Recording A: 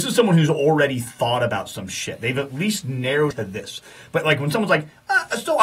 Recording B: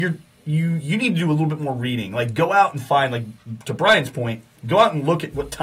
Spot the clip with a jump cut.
A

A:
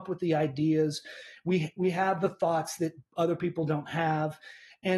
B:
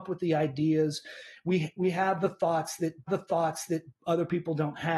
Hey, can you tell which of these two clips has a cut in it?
B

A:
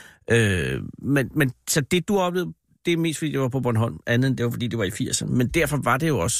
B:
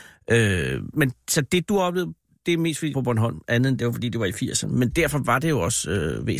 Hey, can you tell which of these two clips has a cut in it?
B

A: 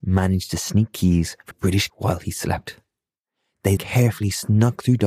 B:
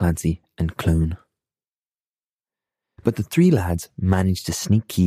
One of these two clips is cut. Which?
A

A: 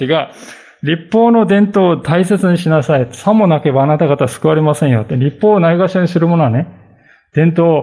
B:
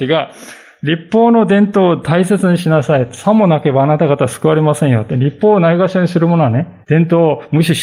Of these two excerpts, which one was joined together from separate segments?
B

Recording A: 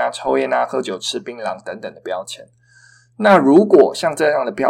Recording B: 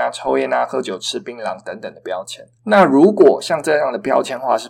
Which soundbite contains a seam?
B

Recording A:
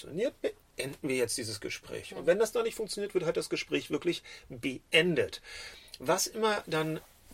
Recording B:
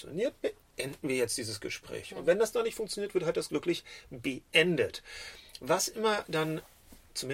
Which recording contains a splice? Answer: B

